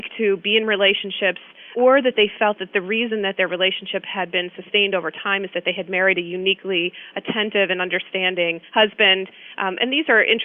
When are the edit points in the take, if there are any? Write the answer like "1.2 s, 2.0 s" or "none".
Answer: 8.7 s